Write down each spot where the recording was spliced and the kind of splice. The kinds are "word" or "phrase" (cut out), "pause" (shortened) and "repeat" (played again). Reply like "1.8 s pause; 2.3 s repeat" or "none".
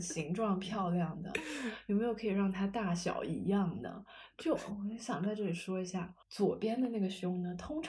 6.2 s pause